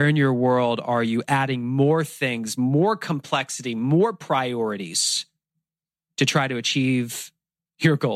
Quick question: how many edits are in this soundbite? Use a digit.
0